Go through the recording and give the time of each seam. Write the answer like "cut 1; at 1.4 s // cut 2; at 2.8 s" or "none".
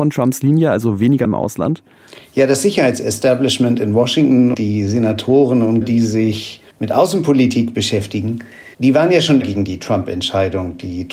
cut 1; at 1.2 s // cut 2; at 4.5 s // cut 3; at 5.8 s // cut 4; at 6.7 s // cut 5; at 8.7 s // cut 6; at 9.4 s